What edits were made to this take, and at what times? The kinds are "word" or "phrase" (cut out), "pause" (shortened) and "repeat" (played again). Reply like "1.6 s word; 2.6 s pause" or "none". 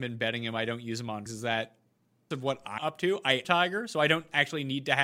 1.3 s word; 2.3 s word; 2.8 s word; 3.4 s phrase

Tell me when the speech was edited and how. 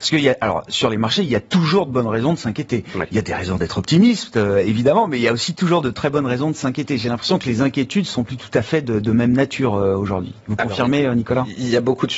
none

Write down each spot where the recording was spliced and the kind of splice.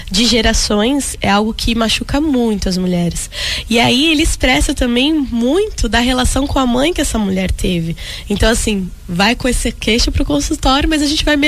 none

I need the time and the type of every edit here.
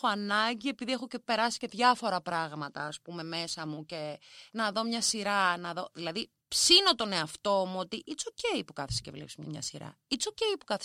6.4 s pause

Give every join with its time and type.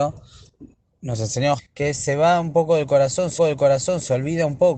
1.6 s word; 3.4 s repeat

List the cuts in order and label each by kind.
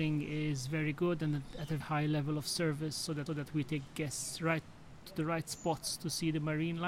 1.8 s word; 3.3 s repeat

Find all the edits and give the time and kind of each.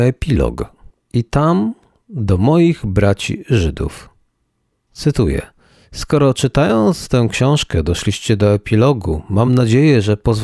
none

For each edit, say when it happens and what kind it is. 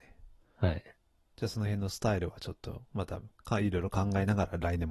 none

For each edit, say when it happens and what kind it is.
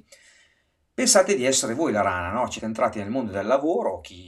2.6 s word

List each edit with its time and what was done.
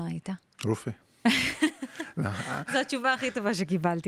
none

